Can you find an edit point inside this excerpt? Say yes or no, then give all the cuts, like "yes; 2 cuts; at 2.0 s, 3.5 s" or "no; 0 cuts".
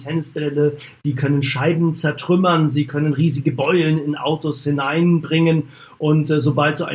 no; 0 cuts